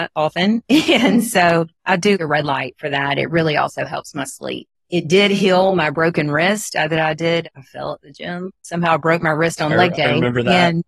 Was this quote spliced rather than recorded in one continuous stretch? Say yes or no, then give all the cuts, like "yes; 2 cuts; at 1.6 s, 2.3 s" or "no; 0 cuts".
yes; 1 cut; at 1.7 s